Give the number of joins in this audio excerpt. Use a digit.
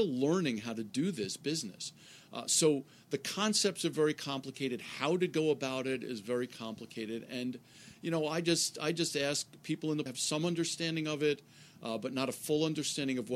1